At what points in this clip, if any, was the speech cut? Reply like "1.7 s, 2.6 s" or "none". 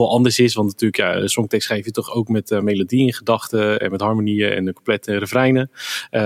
none